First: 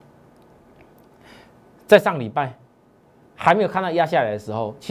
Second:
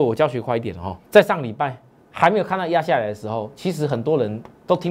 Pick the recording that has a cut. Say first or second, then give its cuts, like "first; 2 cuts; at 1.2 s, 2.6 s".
second; 2 cuts; at 1.0 s, 1.9 s